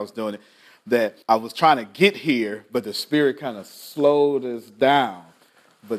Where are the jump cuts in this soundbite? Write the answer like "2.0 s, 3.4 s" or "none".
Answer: 1.2 s

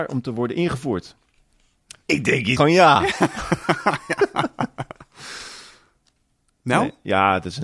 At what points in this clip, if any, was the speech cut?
2.6 s

